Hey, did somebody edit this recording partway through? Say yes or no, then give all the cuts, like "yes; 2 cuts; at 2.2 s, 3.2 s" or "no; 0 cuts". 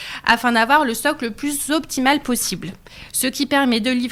no; 0 cuts